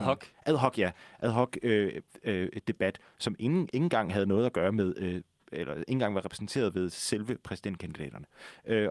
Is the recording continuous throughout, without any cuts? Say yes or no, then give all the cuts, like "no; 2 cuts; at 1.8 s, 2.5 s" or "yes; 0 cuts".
yes; 0 cuts